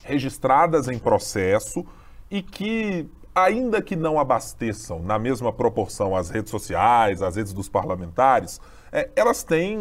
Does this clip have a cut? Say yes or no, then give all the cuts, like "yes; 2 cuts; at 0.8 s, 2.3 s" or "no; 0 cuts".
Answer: no; 0 cuts